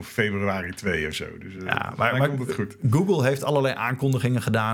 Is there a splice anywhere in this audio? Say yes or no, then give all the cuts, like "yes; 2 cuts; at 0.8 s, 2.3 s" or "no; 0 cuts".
no; 0 cuts